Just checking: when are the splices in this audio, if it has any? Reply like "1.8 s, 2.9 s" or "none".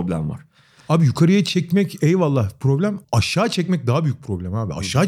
3.0 s